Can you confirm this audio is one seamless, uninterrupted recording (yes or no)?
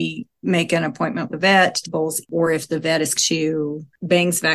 no